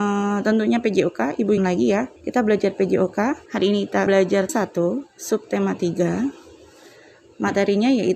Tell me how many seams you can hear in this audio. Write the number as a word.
five